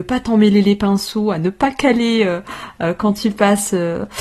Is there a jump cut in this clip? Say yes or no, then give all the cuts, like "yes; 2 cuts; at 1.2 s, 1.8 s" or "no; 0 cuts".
no; 0 cuts